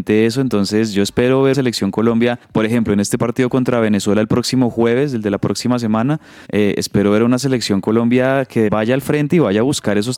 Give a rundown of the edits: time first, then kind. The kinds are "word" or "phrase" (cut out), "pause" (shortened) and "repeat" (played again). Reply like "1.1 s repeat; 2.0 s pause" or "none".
1.5 s word; 2.4 s pause; 3.2 s word; 6.4 s pause; 8.7 s word